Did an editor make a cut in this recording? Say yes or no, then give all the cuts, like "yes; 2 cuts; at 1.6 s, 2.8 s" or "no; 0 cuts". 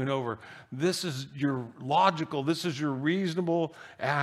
no; 0 cuts